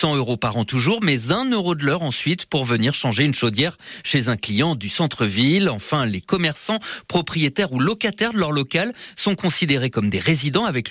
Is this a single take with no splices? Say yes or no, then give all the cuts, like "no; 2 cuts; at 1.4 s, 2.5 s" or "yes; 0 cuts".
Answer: yes; 0 cuts